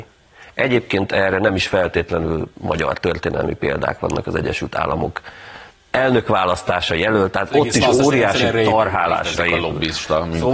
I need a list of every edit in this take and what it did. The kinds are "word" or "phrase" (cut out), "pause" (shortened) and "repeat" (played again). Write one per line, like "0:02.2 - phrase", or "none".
0:02.5 - pause
0:05.7 - pause